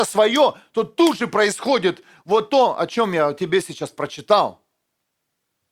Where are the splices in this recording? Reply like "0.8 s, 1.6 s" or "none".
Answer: none